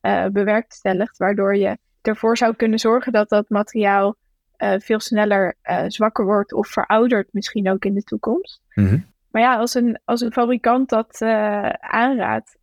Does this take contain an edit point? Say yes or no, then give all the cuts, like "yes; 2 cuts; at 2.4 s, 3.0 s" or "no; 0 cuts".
no; 0 cuts